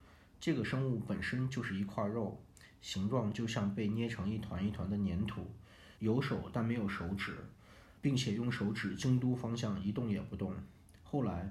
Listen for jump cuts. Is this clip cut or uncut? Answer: cut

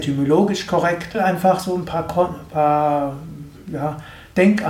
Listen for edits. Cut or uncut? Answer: cut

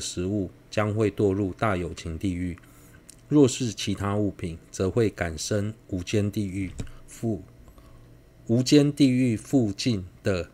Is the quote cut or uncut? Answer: uncut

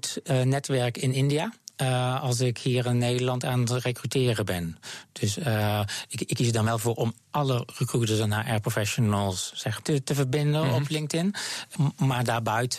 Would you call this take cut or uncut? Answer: cut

